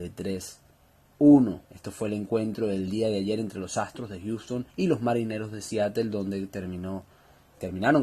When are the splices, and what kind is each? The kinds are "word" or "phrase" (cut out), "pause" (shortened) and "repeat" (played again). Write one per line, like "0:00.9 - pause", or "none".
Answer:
0:01.6 - pause
0:04.7 - pause